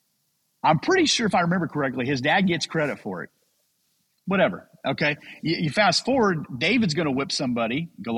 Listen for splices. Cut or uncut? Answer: uncut